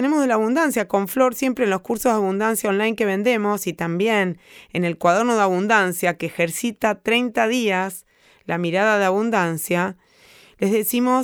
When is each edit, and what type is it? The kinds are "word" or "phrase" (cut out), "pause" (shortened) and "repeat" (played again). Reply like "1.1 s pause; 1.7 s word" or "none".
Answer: none